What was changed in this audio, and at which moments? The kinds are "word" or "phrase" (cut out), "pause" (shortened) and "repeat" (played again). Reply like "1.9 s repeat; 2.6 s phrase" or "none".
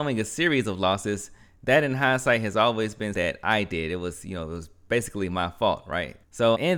3.1 s word